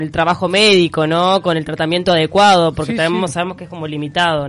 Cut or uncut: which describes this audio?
uncut